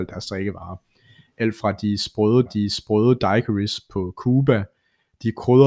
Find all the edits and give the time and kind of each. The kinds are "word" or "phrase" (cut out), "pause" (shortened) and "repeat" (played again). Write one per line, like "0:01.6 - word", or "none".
0:02.5 - repeat